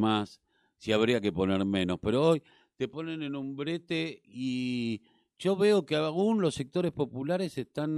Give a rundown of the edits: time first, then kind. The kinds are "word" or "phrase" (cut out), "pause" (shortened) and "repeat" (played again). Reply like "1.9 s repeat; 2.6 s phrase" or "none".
none

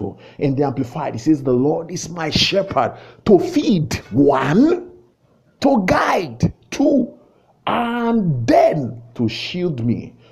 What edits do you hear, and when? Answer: none

